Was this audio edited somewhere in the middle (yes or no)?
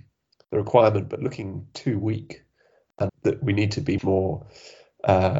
yes